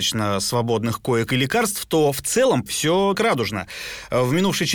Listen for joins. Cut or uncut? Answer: cut